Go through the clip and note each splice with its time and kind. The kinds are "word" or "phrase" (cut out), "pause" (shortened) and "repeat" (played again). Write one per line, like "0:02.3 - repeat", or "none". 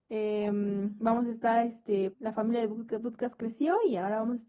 0:02.1 - word

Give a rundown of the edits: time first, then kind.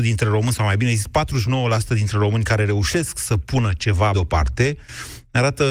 0:04.1 - word

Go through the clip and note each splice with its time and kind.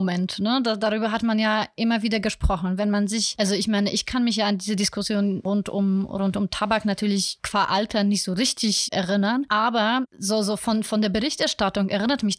none

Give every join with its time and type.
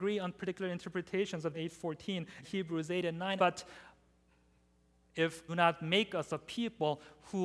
0:01.5 - word
0:02.4 - word
0:03.4 - phrase
0:05.5 - phrase

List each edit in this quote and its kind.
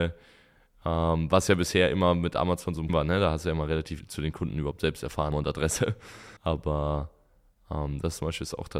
0:02.9 - word
0:04.0 - word
0:05.3 - phrase
0:06.4 - pause

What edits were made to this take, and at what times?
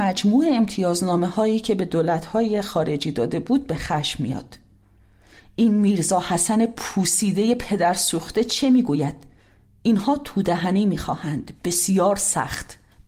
none

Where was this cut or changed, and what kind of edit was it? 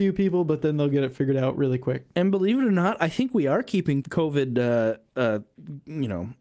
0:04.0 - word

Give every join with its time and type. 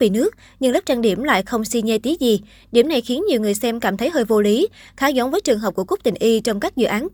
none

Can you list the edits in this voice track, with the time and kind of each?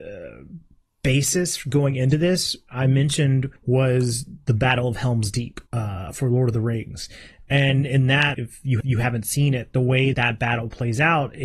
0:03.6 - pause
0:05.7 - pause
0:08.3 - word
0:08.8 - repeat
0:10.1 - word

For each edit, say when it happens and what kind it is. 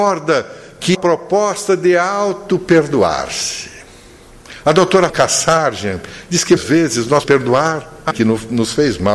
0:00.9 - phrase
0:05.1 - word
0:06.6 - word
0:07.2 - word
0:08.1 - word

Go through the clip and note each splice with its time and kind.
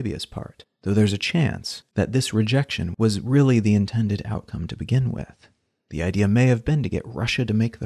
none

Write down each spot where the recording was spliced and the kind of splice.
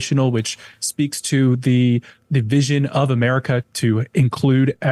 0:02.2 - word
0:03.6 - word

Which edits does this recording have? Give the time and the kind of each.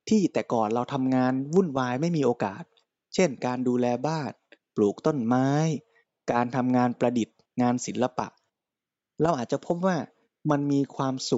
none

